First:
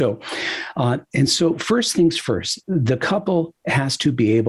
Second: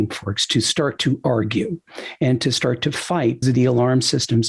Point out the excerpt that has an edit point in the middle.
second; 1 cut; at 3.4 s

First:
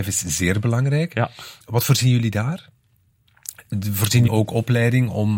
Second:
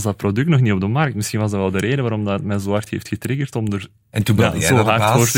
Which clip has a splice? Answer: first; 2 cuts; at 1.6 s, 4.3 s

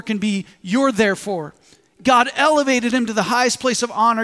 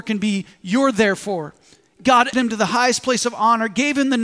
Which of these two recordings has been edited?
second; 1 cut; at 2.3 s

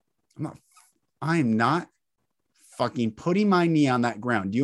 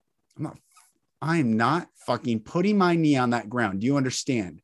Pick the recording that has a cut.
second; 1 cut; at 1.9 s

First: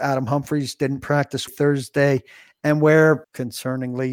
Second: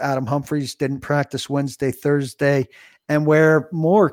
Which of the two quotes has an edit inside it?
first; 2 cuts; at 1.5 s, 3.2 s

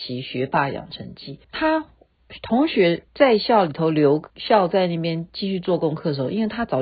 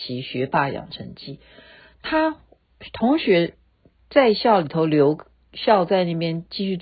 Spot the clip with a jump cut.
first; 3 cuts; at 1.4 s, 3.1 s, 4.3 s

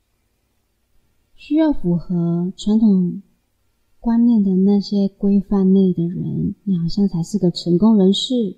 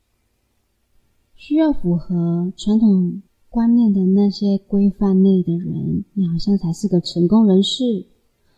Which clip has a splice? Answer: second; 1 cut; at 3.3 s

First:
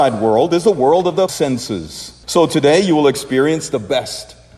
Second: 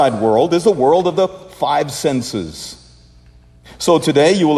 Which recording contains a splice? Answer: first; 2 cuts; at 1.3 s, 2.2 s

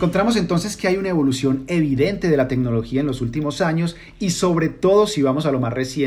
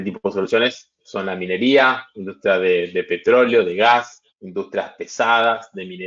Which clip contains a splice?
second; 1 cut; at 4.3 s

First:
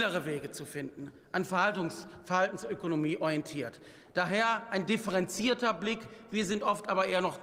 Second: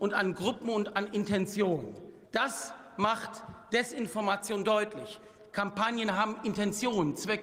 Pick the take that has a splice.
second; 1 cut; at 2.2 s

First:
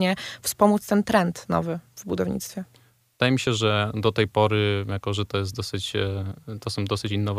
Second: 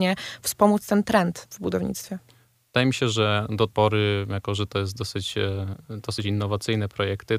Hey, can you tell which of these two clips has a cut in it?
second; 3 cuts; at 1.5 s, 3.7 s, 6.2 s

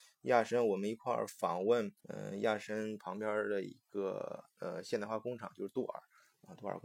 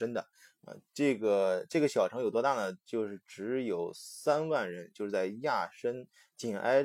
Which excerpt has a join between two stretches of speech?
first; 1 cut; at 2.0 s

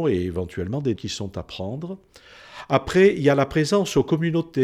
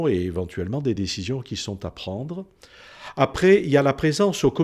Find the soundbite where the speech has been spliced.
first; 1 cut; at 1.0 s

